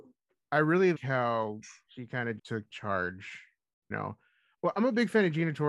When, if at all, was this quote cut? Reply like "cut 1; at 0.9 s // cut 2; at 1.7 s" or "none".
cut 1; at 0.9 s // cut 2; at 2.4 s // cut 3; at 3.9 s